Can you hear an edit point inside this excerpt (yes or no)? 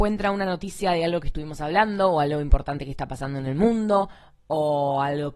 no